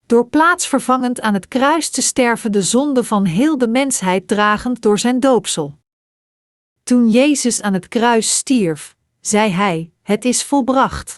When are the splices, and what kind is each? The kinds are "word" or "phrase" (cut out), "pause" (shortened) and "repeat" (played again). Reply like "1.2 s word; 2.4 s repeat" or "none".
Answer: 10.0 s pause